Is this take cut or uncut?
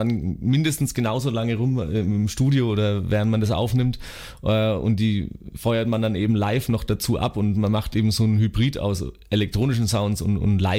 uncut